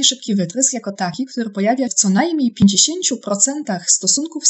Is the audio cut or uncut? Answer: cut